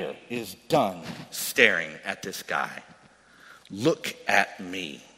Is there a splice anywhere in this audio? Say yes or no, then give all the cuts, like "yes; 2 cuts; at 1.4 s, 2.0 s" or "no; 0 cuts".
no; 0 cuts